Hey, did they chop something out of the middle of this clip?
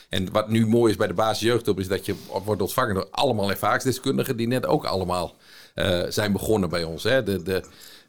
no; 0 cuts

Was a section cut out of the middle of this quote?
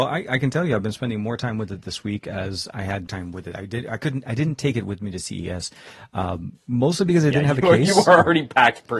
yes; 1 cut; at 3.1 s

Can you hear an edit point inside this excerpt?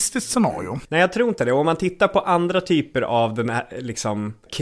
no; 0 cuts

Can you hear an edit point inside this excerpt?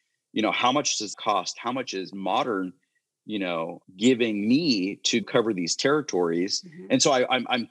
yes; 3 cuts; at 1.1 s, 3.8 s, 5.2 s

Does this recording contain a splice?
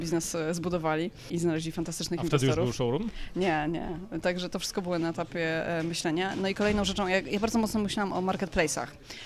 no; 0 cuts

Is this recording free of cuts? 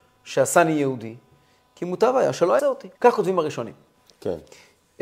no; 2 cuts; at 2.6 s, 2.9 s

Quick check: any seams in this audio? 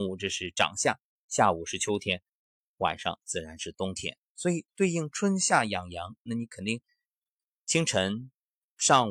no; 0 cuts

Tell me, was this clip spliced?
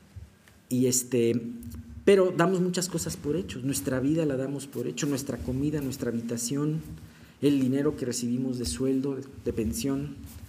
no; 0 cuts

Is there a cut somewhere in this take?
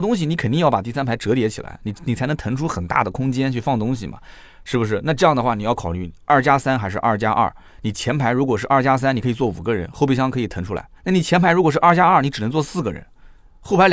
yes; 1 cut; at 11.0 s

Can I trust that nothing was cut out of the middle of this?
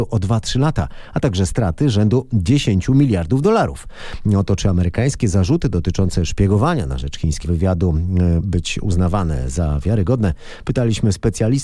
no; 2 cuts; at 7.4 s, 8.4 s

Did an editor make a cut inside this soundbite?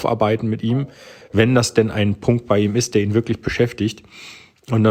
no; 0 cuts

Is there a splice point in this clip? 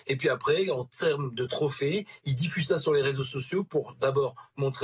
no; 0 cuts

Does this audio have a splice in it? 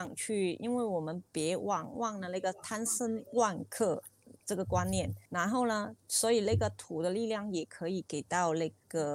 yes; 2 cuts; at 1.3 s, 5.3 s

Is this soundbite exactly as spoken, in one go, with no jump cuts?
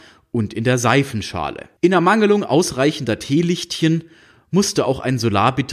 no; 1 cut; at 1.8 s

